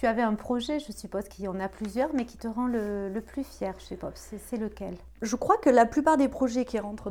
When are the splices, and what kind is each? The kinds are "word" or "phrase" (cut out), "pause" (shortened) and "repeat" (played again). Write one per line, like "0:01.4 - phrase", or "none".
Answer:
none